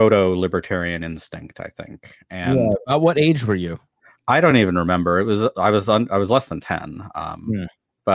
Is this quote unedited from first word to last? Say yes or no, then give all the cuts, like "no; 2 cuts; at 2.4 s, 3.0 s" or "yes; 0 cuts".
yes; 0 cuts